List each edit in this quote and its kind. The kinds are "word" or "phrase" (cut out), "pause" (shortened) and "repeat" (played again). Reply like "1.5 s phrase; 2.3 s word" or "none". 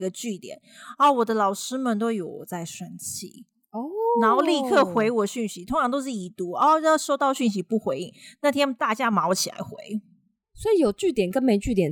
none